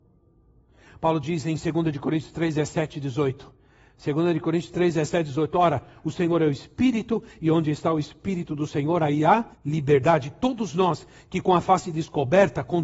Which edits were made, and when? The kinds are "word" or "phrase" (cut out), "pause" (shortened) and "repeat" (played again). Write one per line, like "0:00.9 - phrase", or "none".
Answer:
0:09.5 - pause